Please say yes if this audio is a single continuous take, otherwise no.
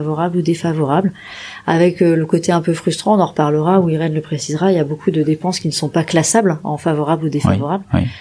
yes